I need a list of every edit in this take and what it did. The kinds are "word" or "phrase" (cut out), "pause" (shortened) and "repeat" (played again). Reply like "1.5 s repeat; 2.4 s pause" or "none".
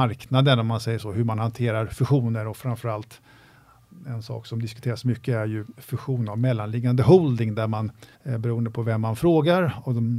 8.1 s pause